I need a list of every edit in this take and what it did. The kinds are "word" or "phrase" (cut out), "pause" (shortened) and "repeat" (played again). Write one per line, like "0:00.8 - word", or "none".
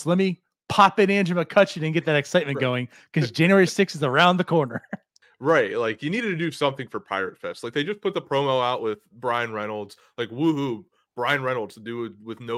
0:05.2 - pause